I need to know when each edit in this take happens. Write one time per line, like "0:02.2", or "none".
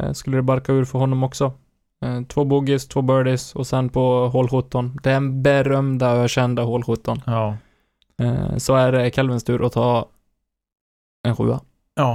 none

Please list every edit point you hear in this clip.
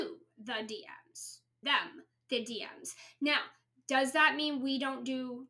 0:01.6

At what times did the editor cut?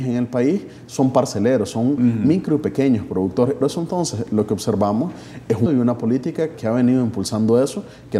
0:03.6
0:05.7
0:06.5

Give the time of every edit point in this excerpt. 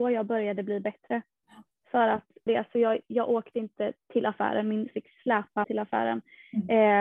0:02.5
0:04.9
0:05.6

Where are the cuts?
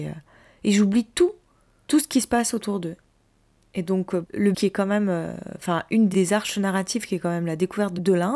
0:04.5

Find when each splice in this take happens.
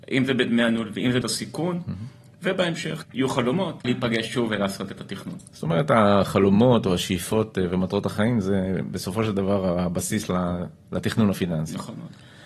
0:01.2
0:03.0
0:03.8

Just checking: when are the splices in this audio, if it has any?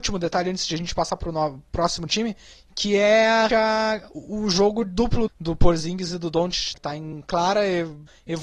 0:03.5
0:05.3
0:06.7

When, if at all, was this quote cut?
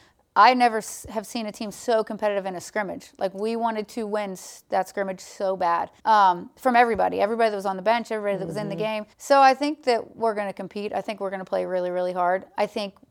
0:06.0
0:09.1

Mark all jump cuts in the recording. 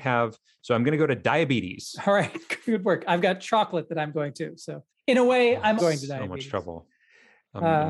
0:04.9
0:05.8

